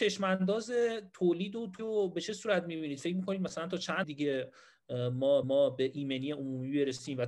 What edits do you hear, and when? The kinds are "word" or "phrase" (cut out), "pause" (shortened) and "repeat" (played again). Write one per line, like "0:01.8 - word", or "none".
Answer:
0:01.8 - word
0:04.0 - word
0:05.4 - repeat